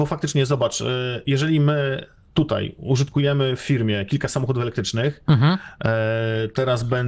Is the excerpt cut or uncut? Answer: cut